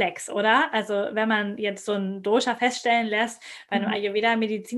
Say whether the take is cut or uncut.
uncut